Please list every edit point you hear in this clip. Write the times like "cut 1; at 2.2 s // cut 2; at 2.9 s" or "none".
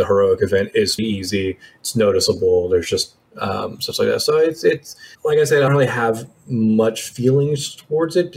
cut 1; at 1.0 s // cut 2; at 3.3 s // cut 3; at 5.1 s // cut 4; at 5.7 s